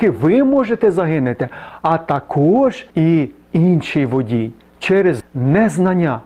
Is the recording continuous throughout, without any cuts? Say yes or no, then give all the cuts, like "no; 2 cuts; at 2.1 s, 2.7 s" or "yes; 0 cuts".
no; 2 cuts; at 2.9 s, 5.2 s